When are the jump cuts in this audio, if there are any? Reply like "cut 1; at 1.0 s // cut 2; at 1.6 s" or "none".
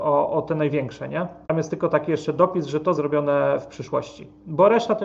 cut 1; at 1.4 s // cut 2; at 2.9 s